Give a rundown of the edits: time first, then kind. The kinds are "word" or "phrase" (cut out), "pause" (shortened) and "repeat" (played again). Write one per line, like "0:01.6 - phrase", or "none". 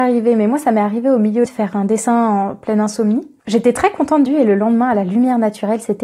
0:01.5 - phrase
0:03.4 - pause
0:04.3 - word